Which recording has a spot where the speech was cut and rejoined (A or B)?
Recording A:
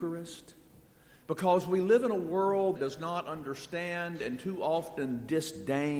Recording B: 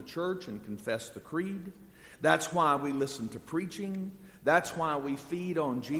A